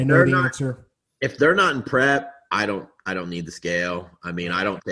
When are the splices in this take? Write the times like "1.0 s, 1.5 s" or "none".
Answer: none